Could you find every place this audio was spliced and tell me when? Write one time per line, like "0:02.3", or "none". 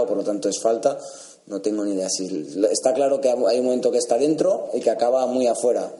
none